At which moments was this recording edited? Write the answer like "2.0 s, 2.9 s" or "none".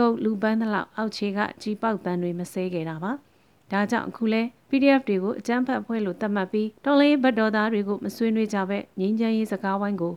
3.2 s, 4.6 s, 6.8 s